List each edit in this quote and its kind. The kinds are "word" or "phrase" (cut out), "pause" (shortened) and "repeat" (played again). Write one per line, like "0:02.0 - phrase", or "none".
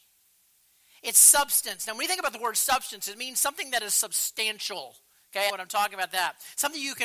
0:05.5 - phrase

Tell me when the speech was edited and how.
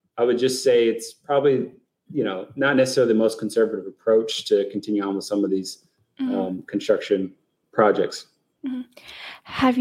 none

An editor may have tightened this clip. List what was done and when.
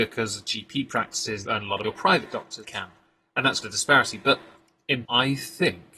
0:01.5 - word
0:01.8 - word
0:02.6 - word
0:03.6 - word
0:05.0 - word

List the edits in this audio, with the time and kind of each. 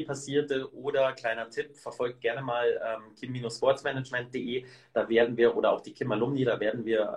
none

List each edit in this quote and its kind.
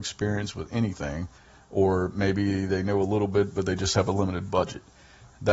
0:01.4 - pause

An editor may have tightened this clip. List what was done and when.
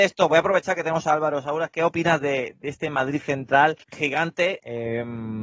0:03.8 - pause

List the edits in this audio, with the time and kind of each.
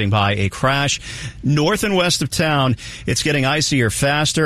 none

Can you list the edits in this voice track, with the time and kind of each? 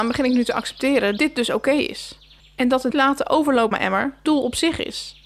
0:01.2 - word
0:02.4 - pause
0:02.9 - word
0:03.7 - word
0:04.3 - word

